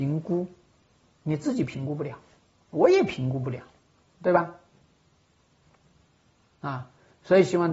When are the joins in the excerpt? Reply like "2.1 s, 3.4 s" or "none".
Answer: 3.8 s